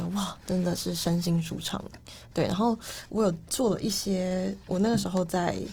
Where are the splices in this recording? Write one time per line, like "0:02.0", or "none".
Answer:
0:02.3